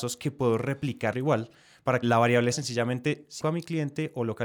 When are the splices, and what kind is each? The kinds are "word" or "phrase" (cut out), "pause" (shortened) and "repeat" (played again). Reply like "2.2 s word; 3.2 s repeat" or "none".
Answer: 1.1 s word; 2.0 s word; 2.5 s word; 3.4 s word